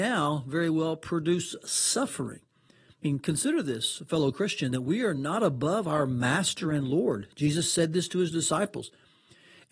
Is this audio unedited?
yes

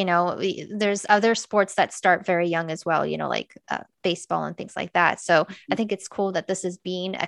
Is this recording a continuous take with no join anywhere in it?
yes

